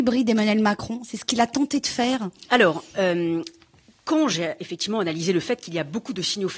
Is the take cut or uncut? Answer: uncut